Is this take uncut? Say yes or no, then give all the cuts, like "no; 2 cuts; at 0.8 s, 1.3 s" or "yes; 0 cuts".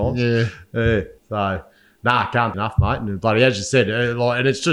no; 2 cuts; at 1.2 s, 2.5 s